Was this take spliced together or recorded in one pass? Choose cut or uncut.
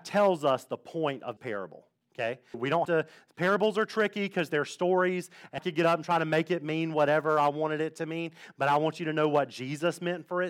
cut